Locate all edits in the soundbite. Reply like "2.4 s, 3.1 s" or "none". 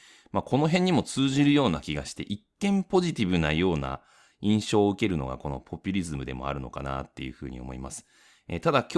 none